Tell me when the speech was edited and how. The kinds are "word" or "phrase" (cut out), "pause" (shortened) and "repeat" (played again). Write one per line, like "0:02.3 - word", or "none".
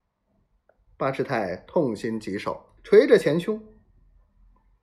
0:02.8 - pause